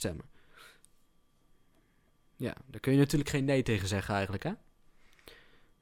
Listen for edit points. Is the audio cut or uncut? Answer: uncut